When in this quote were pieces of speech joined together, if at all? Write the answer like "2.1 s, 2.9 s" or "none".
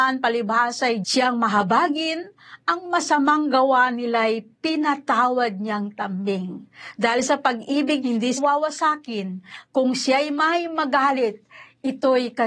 1.0 s, 8.0 s, 8.4 s